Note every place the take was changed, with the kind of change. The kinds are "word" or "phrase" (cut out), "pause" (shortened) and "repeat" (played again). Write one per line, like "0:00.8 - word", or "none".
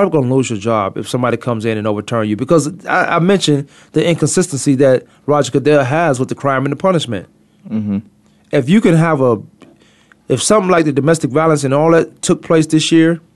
none